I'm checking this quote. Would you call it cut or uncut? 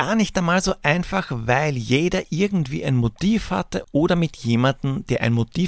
uncut